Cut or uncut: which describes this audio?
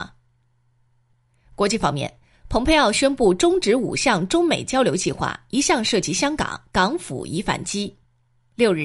uncut